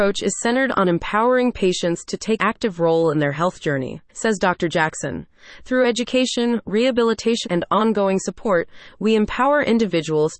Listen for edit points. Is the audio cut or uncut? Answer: cut